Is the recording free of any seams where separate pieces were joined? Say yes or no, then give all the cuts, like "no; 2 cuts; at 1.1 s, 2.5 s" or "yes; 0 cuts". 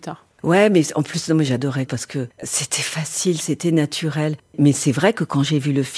no; 1 cut; at 1.9 s